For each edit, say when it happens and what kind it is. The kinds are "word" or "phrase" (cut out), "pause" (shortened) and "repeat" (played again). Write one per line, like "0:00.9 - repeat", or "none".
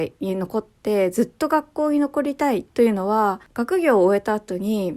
0:02.7 - pause
0:03.4 - pause